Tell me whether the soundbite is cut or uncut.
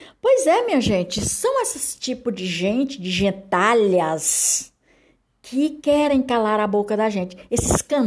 uncut